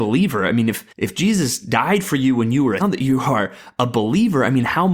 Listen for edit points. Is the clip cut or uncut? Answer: cut